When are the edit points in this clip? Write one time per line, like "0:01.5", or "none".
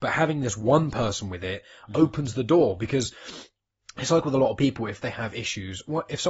none